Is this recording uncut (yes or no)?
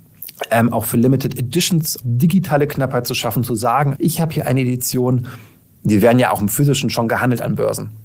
no